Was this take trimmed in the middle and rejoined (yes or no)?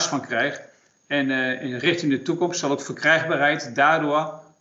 no